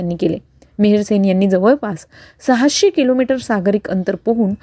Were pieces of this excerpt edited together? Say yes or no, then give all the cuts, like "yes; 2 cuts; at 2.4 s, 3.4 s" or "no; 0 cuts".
no; 0 cuts